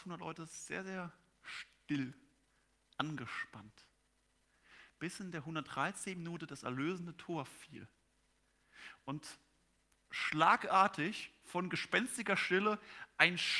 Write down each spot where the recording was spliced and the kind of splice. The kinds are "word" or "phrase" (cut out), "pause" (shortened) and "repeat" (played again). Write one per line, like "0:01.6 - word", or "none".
none